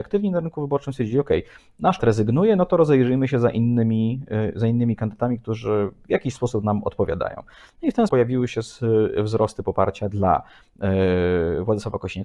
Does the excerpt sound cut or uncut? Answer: cut